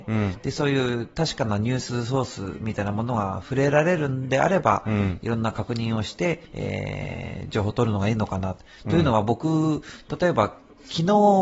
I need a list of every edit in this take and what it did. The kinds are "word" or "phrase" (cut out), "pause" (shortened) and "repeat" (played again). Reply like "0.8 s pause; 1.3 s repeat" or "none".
6.5 s pause